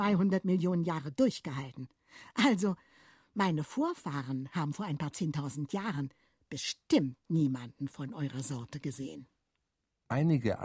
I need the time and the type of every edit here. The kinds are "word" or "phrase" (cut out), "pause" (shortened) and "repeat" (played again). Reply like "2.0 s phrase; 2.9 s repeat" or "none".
none